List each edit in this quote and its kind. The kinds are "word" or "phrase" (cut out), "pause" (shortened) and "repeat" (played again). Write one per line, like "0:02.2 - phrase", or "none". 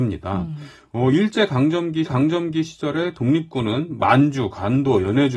0:02.1 - repeat